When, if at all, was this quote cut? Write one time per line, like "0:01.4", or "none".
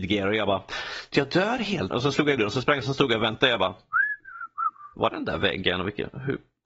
0:01.1
0:01.9
0:02.4
0:02.8
0:05.1

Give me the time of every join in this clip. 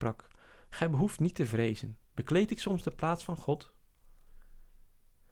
0:02.1

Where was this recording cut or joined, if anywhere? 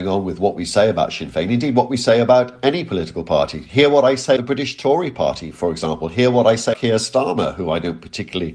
0:04.4
0:06.7

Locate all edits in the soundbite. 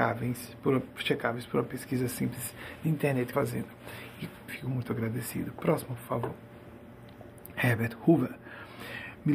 0:03.3
0:04.5

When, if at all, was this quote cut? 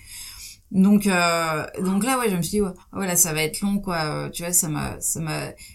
0:02.8

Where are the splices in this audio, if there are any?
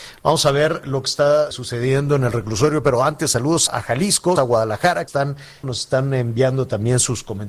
0:01.5
0:03.7
0:04.4
0:05.1
0:05.6

